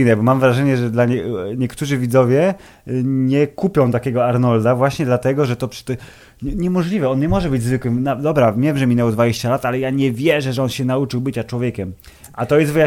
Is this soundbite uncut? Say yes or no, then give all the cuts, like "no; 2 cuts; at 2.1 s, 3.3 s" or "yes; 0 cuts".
yes; 0 cuts